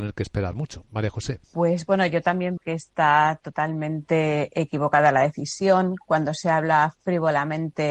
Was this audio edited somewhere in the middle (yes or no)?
yes